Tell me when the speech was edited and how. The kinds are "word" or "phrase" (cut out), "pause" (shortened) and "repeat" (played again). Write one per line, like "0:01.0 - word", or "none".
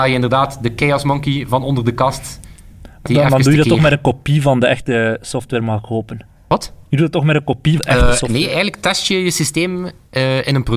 0:03.1 - word
0:07.8 - word